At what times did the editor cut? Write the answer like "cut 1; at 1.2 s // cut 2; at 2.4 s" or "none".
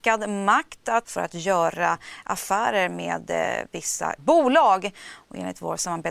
cut 1; at 1.0 s // cut 2; at 4.2 s